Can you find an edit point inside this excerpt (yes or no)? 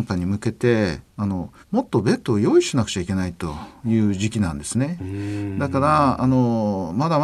yes